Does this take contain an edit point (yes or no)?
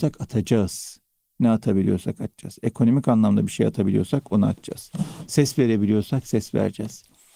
no